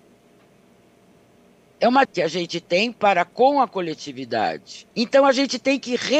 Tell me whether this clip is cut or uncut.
cut